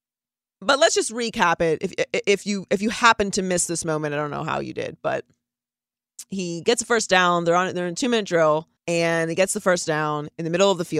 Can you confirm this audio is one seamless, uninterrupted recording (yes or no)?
no